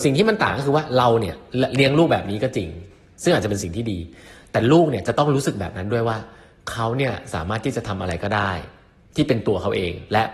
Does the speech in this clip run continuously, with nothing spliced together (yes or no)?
yes